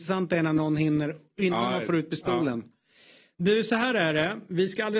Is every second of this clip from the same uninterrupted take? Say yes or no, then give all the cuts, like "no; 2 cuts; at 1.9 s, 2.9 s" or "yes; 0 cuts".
yes; 0 cuts